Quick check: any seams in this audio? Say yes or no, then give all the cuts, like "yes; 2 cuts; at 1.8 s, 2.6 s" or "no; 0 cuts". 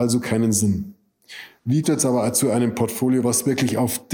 yes; 1 cut; at 1.8 s